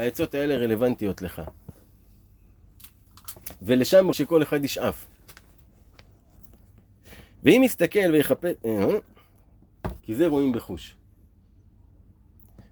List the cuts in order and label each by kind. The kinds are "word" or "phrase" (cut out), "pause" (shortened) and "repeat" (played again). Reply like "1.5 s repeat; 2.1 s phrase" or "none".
4.1 s word; 10.0 s pause